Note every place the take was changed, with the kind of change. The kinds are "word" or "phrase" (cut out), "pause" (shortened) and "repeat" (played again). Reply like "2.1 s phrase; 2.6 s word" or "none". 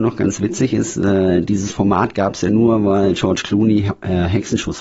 none